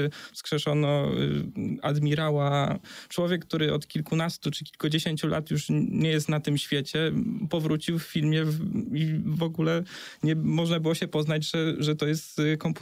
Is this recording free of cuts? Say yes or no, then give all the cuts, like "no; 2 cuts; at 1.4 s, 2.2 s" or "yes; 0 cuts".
yes; 0 cuts